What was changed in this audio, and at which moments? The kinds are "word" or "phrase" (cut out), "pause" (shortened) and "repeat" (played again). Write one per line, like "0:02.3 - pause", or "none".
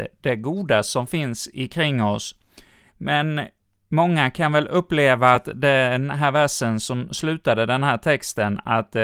none